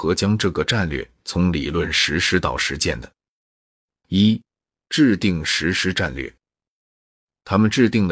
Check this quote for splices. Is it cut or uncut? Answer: uncut